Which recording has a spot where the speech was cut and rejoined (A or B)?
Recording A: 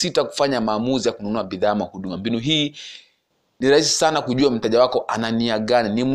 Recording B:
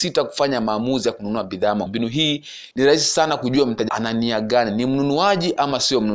B